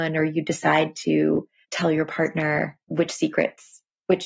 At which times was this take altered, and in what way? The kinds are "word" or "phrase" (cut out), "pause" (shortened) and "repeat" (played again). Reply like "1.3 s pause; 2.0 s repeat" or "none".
2.8 s pause

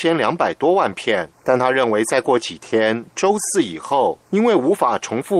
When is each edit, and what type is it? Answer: 1.3 s pause; 4.3 s pause

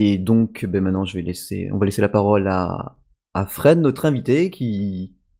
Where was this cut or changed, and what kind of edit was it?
none

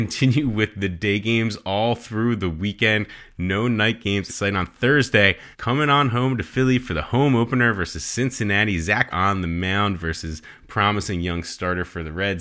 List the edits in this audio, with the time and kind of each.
4.3 s word; 5.5 s pause; 9.1 s word

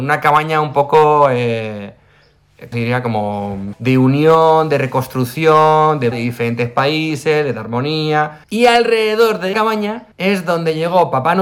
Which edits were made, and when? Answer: 2.7 s word; 3.7 s word; 6.1 s phrase; 8.4 s pause; 9.5 s word; 10.1 s pause

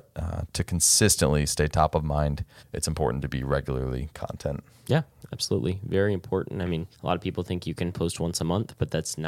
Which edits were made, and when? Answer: 2.6 s pause; 4.1 s word; 6.9 s pause

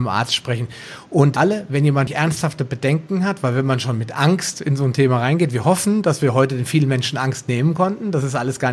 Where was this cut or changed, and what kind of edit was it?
1.4 s phrase; 2.1 s word

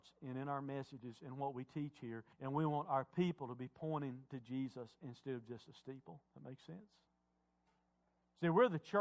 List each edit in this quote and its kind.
2.3 s pause; 6.3 s pause

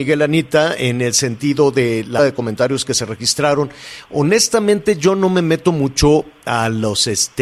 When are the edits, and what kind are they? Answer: 2.2 s word

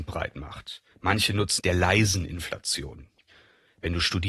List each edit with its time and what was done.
0.9 s pause; 1.6 s phrase

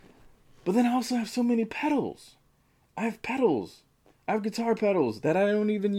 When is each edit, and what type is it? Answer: none

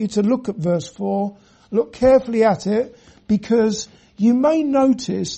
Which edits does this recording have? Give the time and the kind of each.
none

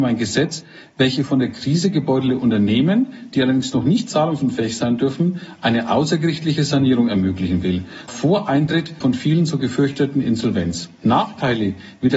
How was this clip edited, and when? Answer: 8.1 s word; 9.0 s word

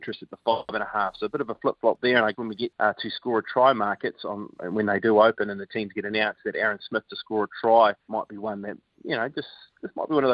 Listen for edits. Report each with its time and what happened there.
2.3 s word; 2.7 s word; 8.0 s pause

